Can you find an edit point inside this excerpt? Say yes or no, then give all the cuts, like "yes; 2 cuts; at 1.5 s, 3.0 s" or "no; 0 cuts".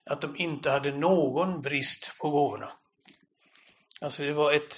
no; 0 cuts